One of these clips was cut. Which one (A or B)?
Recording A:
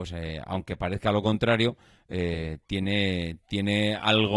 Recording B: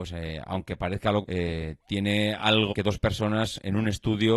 B